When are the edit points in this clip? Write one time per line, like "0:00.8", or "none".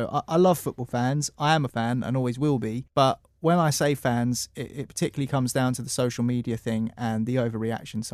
0:01.7
0:02.9